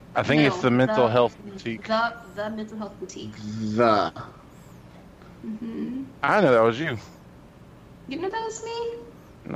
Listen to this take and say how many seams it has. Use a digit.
0